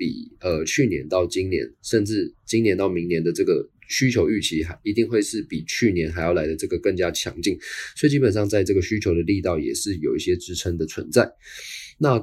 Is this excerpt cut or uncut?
cut